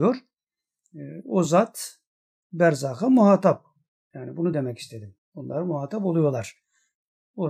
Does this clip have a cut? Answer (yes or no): no